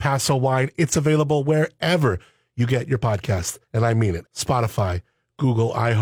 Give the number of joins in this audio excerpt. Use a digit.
2